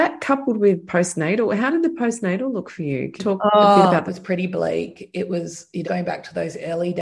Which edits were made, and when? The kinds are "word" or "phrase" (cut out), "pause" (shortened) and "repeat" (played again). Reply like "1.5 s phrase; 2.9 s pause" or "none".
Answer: 3.2 s word; 4.1 s phrase; 5.8 s phrase